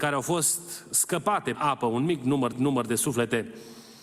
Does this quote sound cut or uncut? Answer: cut